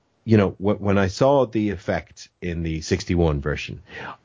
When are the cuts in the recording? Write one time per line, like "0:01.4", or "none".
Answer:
none